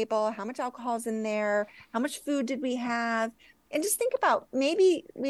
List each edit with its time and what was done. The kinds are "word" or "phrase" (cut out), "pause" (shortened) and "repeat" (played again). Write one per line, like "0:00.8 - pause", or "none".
none